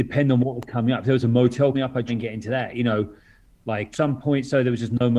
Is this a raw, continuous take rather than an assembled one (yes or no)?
no